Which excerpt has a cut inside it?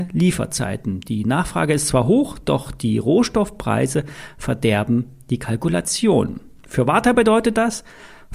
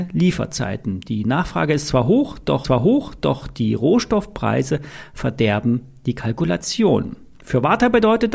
second; 1 cut; at 2.6 s

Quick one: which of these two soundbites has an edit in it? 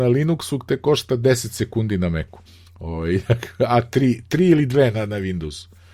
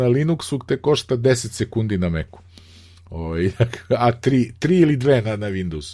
first; 1 cut; at 2.5 s

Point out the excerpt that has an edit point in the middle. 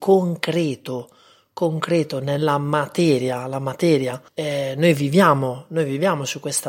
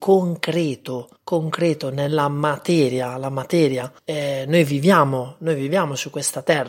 second; 1 cut; at 1.2 s

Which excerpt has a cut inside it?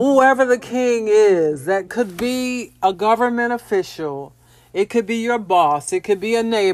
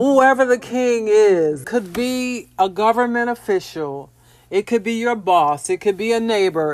second; 1 cut; at 1.6 s

